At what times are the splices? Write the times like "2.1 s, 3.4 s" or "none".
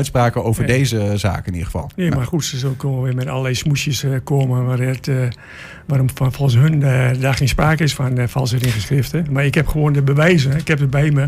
1.9 s